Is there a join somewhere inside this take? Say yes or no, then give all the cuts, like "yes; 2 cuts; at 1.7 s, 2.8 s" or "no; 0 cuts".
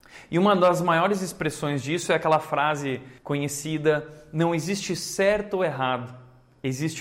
yes; 1 cut; at 3.2 s